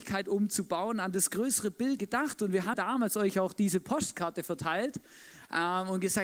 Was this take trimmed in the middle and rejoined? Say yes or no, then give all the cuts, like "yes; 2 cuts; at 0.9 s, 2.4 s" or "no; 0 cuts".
yes; 2 cuts; at 2.0 s, 2.7 s